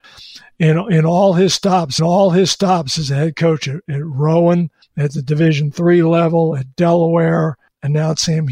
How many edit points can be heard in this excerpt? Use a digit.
1